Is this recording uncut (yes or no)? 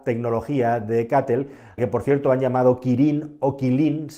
no